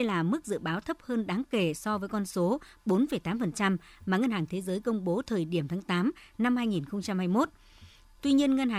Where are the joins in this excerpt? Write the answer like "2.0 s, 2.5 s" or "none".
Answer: none

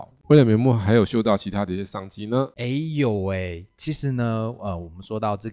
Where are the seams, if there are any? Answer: none

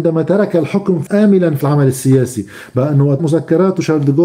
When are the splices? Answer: 1.1 s, 1.6 s, 3.2 s

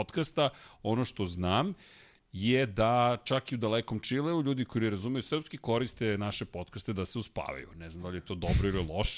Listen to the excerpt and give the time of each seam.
none

